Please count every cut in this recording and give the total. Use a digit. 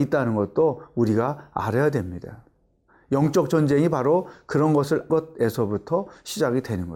1